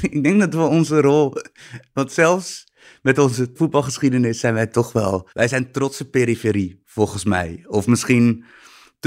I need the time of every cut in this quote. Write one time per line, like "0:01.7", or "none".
0:03.6
0:05.3